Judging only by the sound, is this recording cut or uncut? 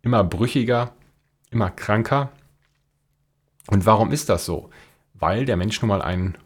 uncut